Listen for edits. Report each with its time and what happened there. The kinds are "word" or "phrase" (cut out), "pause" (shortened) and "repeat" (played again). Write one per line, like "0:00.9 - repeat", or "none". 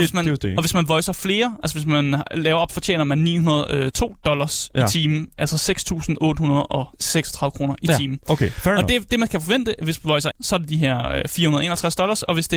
0:02.7 - phrase
0:06.9 - pause
0:10.3 - phrase